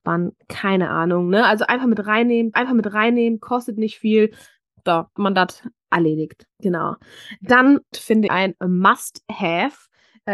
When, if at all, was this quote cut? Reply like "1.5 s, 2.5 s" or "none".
2.5 s, 5.2 s, 6.5 s, 7.9 s, 8.3 s